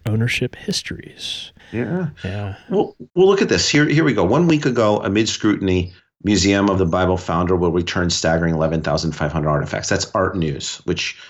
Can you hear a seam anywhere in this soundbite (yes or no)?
yes